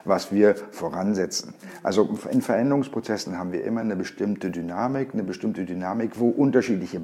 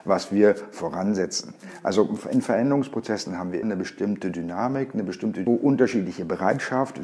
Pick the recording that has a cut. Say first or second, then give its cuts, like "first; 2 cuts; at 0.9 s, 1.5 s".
second; 2 cuts; at 3.6 s, 5.5 s